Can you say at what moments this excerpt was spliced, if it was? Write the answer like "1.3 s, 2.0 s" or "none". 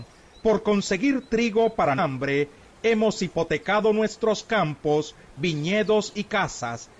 2.0 s